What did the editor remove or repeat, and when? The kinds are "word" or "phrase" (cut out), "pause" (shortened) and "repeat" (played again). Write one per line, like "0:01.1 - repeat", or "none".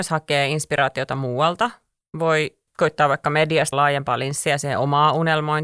0:02.7 - pause
0:03.7 - word